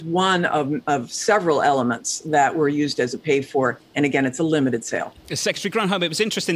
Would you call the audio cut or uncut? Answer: uncut